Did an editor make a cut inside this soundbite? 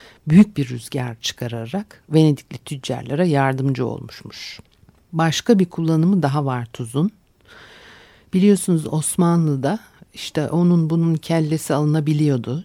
yes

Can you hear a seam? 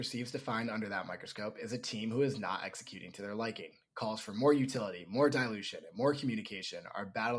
no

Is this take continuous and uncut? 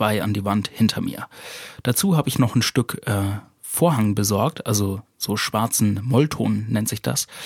yes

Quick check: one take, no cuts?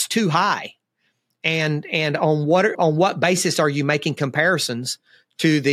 no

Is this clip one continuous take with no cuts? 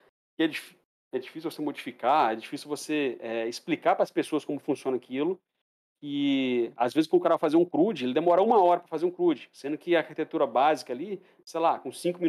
yes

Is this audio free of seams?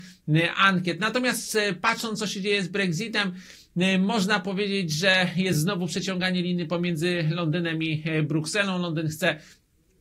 yes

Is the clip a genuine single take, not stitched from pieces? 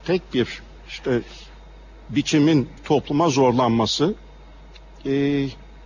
no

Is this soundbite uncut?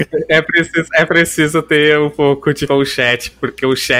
no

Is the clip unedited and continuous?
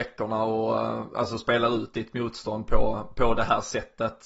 yes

